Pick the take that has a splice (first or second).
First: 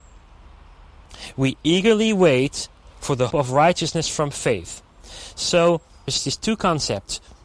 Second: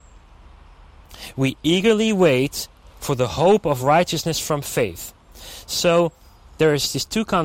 first